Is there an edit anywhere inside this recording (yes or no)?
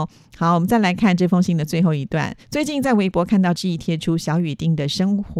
yes